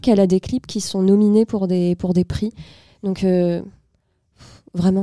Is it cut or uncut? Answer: uncut